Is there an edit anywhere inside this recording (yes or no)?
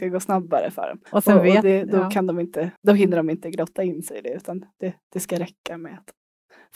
yes